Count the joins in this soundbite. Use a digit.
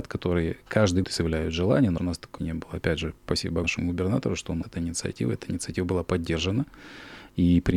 5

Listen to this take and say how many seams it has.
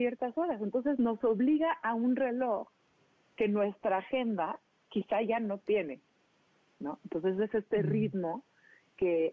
0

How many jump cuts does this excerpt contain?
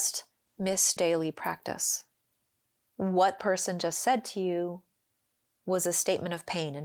2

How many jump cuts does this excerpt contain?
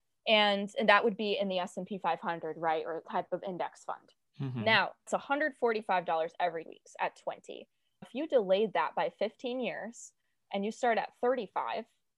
4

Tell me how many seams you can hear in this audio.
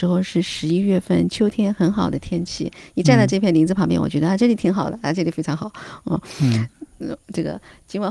0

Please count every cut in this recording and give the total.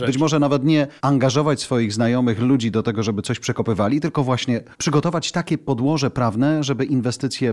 2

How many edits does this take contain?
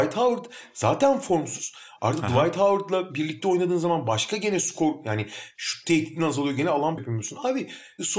1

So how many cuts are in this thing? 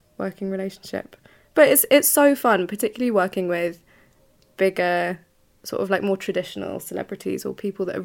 0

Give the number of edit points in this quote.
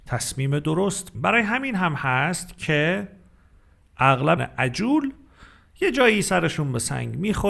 2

